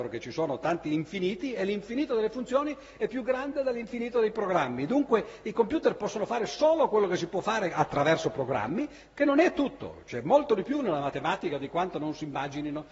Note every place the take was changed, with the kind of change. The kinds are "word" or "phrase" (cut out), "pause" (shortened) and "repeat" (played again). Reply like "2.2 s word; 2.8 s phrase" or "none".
none